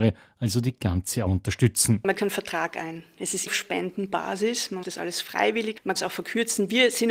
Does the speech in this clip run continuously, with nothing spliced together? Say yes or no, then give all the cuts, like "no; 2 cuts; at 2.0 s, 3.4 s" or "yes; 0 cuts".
no; 5 cuts; at 1.3 s, 2.1 s, 3.5 s, 4.8 s, 5.9 s